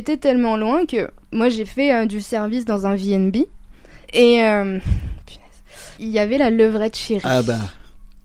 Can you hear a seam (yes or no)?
yes